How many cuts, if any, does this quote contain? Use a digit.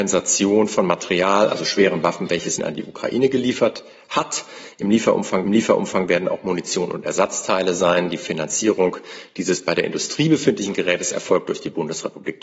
2